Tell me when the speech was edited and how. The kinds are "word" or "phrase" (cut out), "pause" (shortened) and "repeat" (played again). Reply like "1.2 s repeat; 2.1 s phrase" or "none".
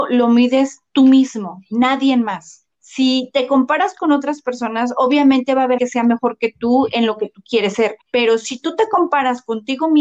2.7 s pause; 5.8 s word; 8.0 s pause